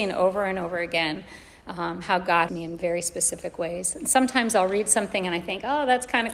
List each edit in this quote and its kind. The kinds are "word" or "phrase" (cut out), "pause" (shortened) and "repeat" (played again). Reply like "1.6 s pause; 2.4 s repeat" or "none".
2.5 s phrase